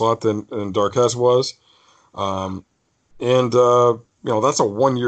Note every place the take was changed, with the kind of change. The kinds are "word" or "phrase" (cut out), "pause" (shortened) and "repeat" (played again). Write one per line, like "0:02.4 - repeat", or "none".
none